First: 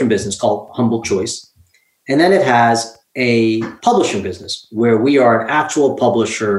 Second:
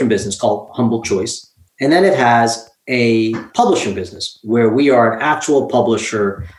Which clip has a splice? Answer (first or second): second